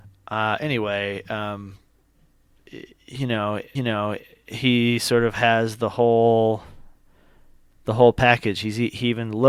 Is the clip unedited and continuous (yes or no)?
no